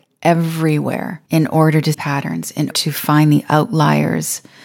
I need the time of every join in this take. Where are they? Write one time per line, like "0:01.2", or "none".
0:01.2
0:01.9
0:02.7